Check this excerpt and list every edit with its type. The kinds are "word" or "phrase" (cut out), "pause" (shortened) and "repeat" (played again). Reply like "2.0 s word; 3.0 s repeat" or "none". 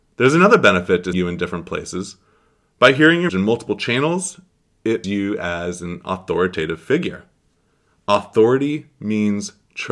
1.1 s word; 3.3 s word; 5.0 s word